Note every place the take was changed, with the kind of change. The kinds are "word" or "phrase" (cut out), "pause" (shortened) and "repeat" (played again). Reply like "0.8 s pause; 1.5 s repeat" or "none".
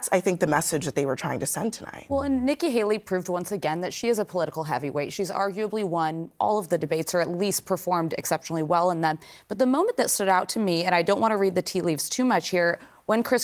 none